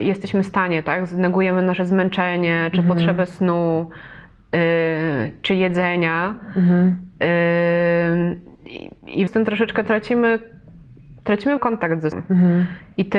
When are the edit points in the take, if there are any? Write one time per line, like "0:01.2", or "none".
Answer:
0:09.3
0:11.6
0:12.1

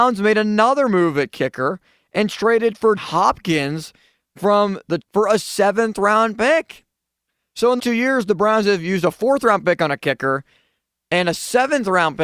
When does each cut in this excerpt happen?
0:03.0
0:05.0
0:07.8

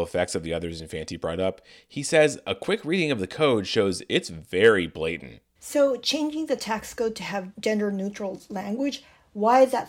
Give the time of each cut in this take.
none

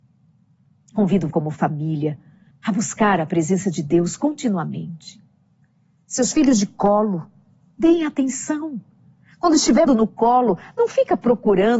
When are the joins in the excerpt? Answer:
0:01.3
0:02.5
0:09.9

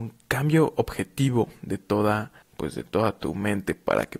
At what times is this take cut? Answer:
0:02.4

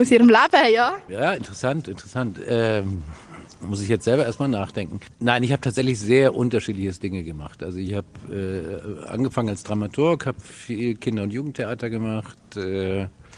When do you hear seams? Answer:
0:01.1

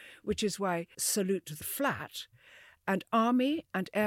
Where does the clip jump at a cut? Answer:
0:00.9
0:01.6

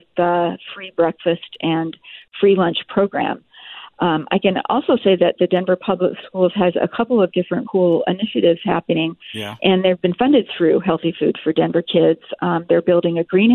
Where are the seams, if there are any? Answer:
0:07.6

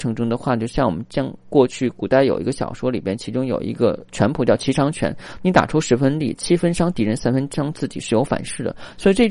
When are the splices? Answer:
0:04.1

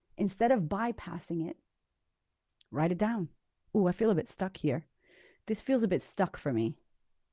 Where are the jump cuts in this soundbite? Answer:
none

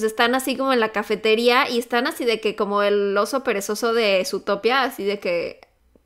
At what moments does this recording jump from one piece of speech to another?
none

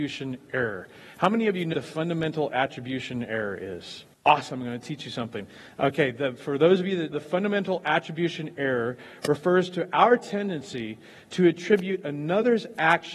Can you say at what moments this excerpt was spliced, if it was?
0:01.7
0:04.1
0:07.1

